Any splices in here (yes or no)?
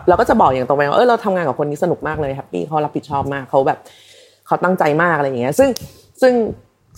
no